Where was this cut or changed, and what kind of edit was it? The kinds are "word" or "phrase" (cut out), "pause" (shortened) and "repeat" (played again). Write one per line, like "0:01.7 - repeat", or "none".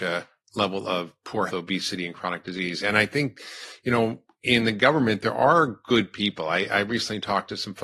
0:01.5 - word